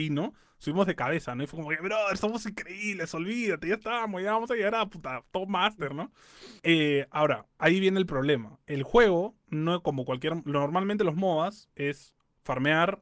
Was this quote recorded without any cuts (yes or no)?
no